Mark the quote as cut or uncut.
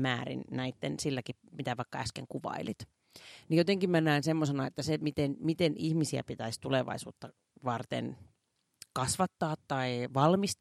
uncut